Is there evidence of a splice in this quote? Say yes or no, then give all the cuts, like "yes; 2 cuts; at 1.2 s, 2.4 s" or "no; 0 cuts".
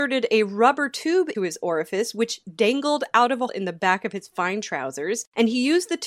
yes; 2 cuts; at 1.3 s, 3.5 s